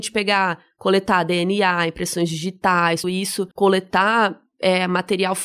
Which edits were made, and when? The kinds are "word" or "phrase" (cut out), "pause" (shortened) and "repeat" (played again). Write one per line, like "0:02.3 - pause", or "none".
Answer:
0:03.0 - word
0:03.5 - pause